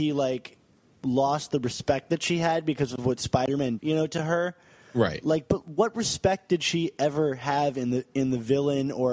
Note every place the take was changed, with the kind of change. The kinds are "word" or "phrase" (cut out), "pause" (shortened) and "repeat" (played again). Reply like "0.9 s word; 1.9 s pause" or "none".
3.8 s word